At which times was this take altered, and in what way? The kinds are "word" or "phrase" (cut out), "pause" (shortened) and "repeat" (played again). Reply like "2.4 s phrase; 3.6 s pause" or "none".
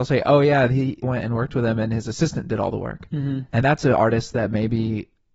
1.0 s word; 3.6 s word